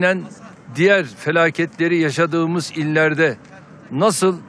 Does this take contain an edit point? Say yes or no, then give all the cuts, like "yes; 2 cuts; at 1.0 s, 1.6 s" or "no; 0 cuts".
no; 0 cuts